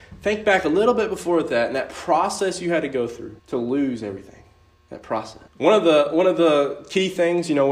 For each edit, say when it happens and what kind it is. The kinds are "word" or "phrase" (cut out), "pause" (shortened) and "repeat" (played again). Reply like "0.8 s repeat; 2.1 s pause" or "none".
3.4 s pause; 4.8 s pause; 5.5 s pause